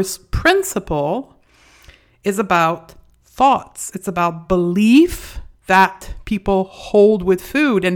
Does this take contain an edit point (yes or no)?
no